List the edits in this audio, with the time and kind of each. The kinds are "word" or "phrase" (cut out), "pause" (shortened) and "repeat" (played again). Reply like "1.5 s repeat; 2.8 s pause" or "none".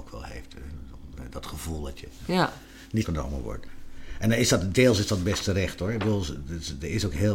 3.0 s word